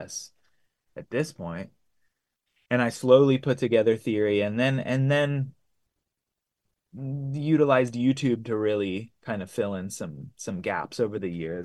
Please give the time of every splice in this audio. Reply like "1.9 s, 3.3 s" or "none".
9.2 s